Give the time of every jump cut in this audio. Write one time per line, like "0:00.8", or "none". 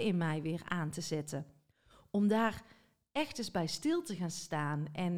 none